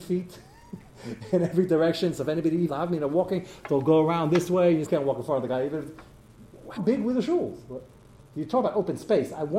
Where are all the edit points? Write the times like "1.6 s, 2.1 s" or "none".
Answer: 2.7 s, 4.9 s, 6.8 s